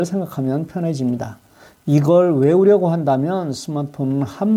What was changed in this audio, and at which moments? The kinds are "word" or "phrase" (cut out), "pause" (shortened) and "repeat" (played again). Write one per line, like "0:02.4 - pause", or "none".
none